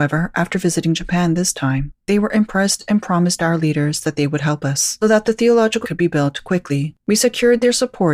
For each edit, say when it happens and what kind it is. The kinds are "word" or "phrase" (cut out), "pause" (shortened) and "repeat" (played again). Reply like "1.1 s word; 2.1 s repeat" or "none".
5.0 s word; 5.8 s word; 7.0 s pause